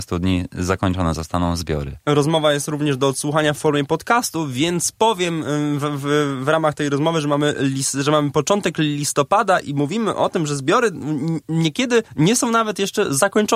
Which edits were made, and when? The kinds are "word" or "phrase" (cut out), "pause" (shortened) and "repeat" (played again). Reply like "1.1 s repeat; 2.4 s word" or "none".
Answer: 12.1 s pause